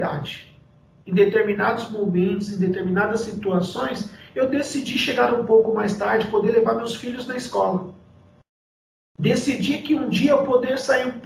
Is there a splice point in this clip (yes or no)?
no